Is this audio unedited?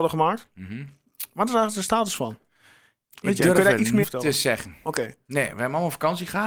no; 1 cut; at 4.0 s

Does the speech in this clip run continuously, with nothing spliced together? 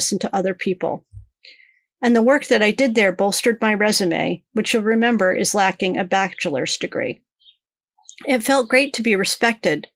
yes; 0 cuts

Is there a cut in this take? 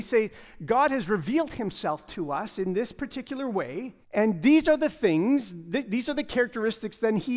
yes; 1 cut; at 4.0 s

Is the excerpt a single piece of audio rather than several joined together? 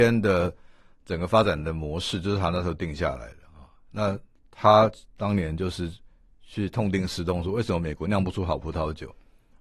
yes; 0 cuts

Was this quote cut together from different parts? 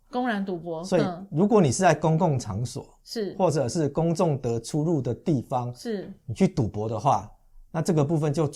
no; 0 cuts

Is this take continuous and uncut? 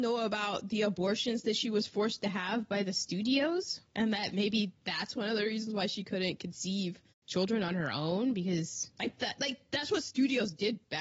no; 4 cuts; at 3.9 s, 4.7 s, 7.1 s, 8.9 s

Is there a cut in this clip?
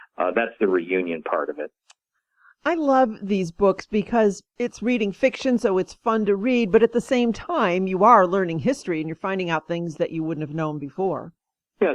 no; 0 cuts

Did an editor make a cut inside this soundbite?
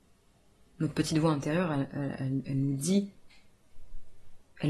no; 0 cuts

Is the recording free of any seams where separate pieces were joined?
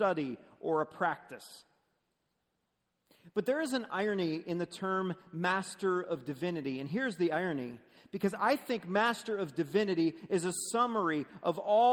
yes; 0 cuts

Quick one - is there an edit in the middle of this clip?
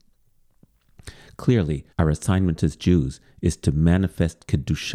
yes; 1 cut; at 1.9 s

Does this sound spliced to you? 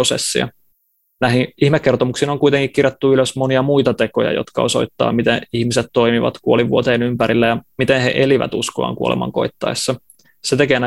no; 0 cuts

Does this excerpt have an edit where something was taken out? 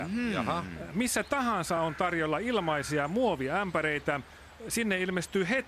no; 0 cuts

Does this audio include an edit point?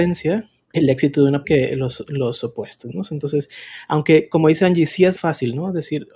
yes; 2 cuts; at 1.4 s, 5.2 s

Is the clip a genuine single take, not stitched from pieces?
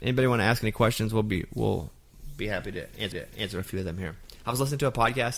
no; 1 cut; at 3.1 s

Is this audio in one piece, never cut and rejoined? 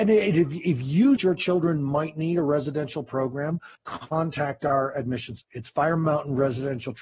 no; 3 cuts; at 1.2 s, 3.7 s, 5.4 s

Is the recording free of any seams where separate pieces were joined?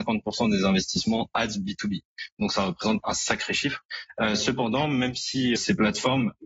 no; 2 cuts; at 3.0 s, 5.6 s

